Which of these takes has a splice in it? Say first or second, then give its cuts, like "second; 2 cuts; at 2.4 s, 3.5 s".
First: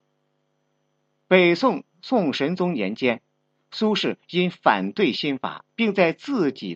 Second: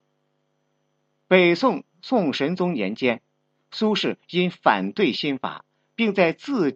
first; 1 cut; at 5.7 s